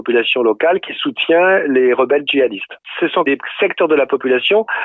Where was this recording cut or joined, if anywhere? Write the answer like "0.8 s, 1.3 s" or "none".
none